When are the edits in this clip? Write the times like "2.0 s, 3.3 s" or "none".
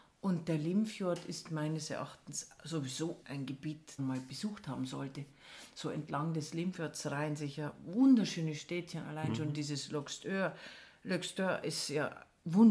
3.2 s, 4.0 s